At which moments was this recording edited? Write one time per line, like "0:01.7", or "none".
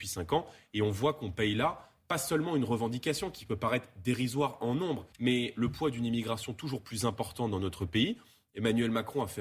0:05.1